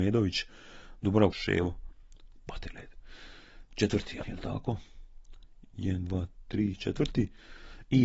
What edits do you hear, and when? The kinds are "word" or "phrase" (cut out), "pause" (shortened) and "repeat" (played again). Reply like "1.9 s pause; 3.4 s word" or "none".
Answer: 1.3 s phrase; 4.2 s phrase

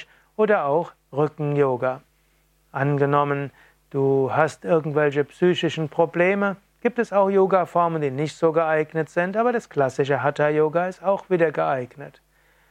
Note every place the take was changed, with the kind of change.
none

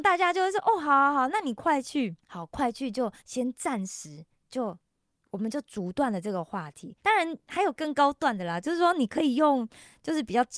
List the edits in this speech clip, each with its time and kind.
2.2 s pause; 3.2 s pause; 7.0 s pause

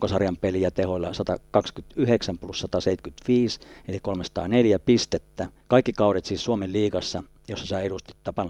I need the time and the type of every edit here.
none

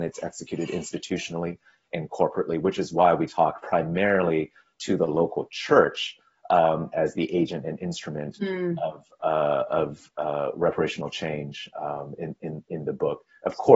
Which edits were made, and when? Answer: none

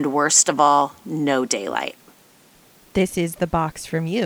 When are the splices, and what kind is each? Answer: none

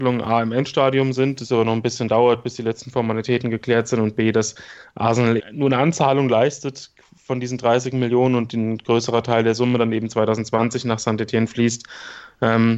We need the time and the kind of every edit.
5.4 s word

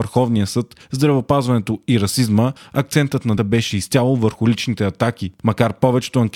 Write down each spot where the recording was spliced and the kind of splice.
3.4 s word

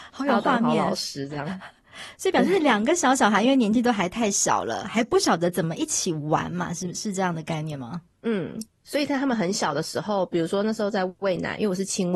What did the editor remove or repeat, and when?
8.1 s pause

